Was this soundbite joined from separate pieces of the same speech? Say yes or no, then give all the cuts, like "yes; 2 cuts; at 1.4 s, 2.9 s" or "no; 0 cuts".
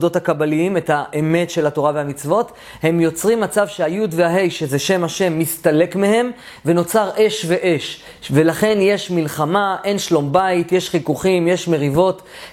no; 0 cuts